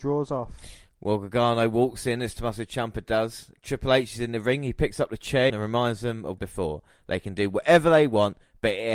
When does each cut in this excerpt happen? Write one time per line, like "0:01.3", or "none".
0:05.5
0:06.4